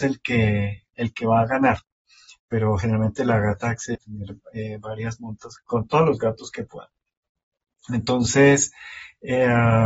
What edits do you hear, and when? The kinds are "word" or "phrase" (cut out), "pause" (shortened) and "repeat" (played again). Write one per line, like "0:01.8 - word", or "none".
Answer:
0:00.9 - word
0:03.9 - word
0:05.6 - word